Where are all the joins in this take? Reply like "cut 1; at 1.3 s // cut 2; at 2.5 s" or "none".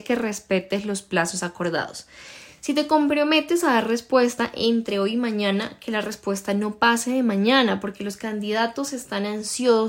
none